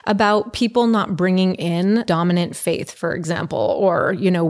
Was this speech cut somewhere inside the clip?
yes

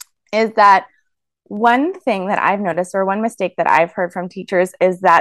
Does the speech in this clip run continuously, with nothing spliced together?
yes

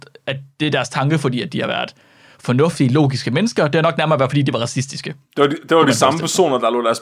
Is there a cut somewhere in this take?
no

